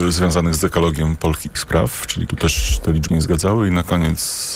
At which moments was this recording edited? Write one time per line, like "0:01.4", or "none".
0:01.6
0:02.3
0:03.1